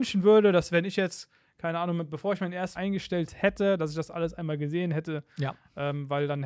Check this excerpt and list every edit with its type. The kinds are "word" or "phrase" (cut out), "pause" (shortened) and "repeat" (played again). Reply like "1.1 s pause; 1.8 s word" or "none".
2.8 s word